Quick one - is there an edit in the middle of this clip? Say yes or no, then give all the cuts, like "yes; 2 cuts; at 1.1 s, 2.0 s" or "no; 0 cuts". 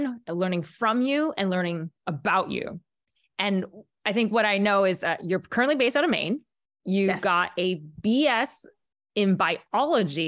no; 0 cuts